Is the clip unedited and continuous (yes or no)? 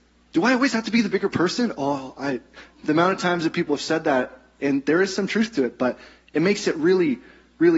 yes